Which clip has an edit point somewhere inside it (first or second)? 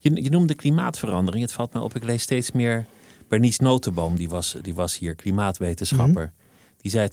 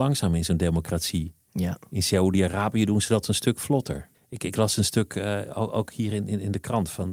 second